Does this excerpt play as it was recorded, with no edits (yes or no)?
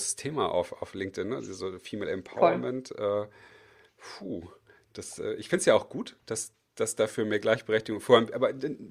yes